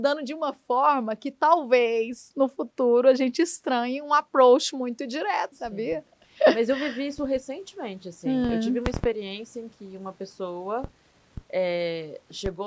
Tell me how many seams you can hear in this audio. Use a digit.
1